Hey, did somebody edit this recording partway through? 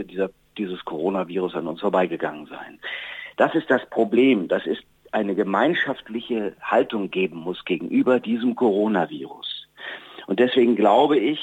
no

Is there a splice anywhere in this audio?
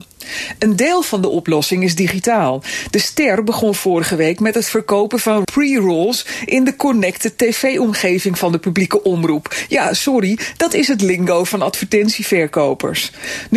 yes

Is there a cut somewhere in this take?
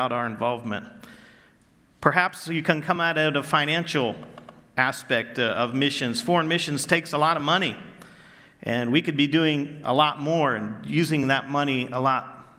no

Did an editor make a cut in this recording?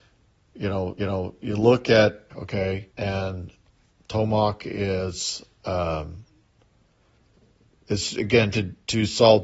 yes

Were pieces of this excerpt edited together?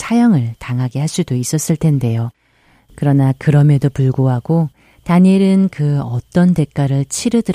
no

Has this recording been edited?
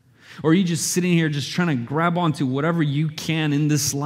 no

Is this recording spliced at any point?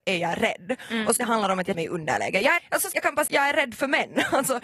yes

